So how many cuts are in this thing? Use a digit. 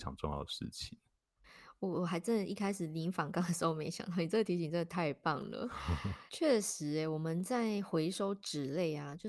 1